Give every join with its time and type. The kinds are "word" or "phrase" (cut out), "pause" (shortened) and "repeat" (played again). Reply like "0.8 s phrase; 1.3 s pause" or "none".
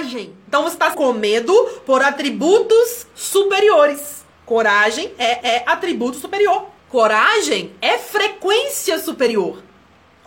0.9 s phrase; 4.3 s pause; 5.4 s repeat; 6.8 s pause